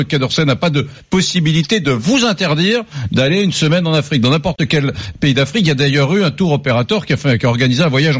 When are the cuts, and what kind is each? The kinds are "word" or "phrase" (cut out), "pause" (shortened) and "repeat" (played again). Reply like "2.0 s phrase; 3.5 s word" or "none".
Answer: none